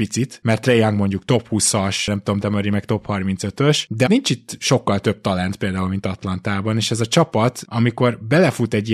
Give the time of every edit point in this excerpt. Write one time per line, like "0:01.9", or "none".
0:02.4
0:04.1

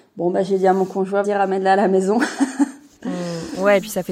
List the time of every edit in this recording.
0:01.2

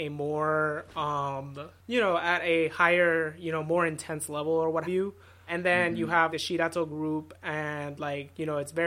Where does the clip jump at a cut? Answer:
0:01.8
0:04.8
0:05.5
0:06.3

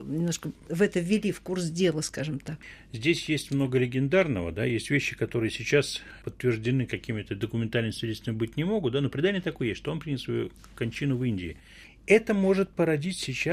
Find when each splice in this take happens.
none

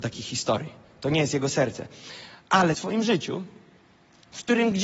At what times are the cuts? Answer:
0:02.7

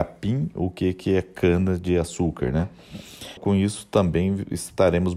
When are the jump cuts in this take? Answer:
0:03.4

